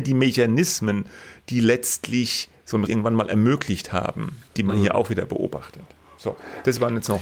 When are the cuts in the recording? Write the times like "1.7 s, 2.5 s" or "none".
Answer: 2.9 s, 4.5 s